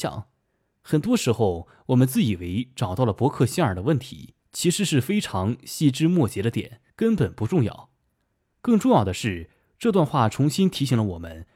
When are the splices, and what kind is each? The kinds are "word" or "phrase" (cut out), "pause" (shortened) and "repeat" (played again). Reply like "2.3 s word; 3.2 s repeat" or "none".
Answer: 4.4 s pause; 6.9 s pause